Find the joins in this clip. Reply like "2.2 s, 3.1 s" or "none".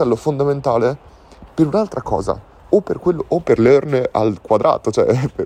2.6 s